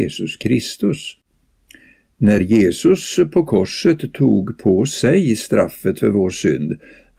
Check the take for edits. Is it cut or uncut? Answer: uncut